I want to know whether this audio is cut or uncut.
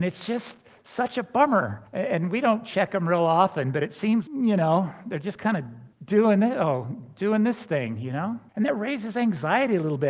cut